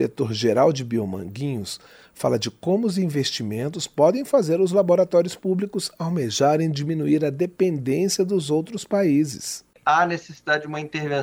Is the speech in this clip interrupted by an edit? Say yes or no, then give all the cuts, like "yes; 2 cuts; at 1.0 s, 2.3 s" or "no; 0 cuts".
no; 0 cuts